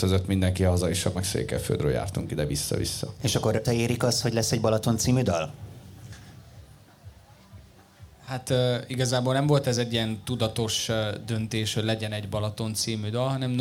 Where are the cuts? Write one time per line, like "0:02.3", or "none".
0:01.1
0:03.6